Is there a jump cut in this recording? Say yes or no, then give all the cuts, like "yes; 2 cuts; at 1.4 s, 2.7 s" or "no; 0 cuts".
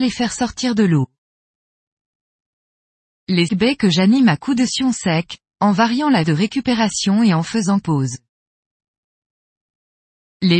yes; 3 cuts; at 3.5 s, 6.2 s, 7.8 s